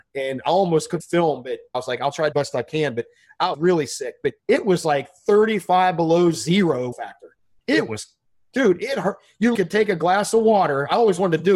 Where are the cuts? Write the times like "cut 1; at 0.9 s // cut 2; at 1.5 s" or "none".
cut 1; at 1.0 s // cut 2; at 2.3 s // cut 3; at 3.5 s // cut 4; at 4.4 s // cut 5; at 6.9 s // cut 6; at 9.5 s